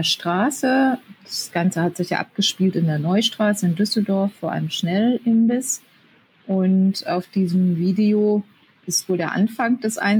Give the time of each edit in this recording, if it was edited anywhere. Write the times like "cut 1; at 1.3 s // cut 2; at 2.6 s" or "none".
none